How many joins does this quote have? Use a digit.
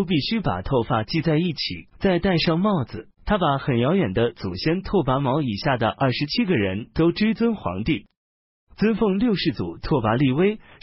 2